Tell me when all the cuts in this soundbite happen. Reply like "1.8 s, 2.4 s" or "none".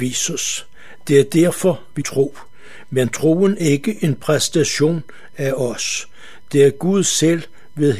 2.0 s, 3.6 s